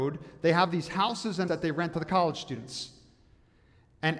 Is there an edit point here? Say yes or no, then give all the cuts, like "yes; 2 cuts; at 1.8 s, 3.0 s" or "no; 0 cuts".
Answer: yes; 2 cuts; at 1.5 s, 1.9 s